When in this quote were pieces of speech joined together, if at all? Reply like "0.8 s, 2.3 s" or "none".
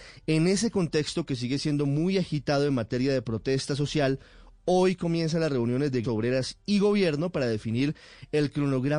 6.0 s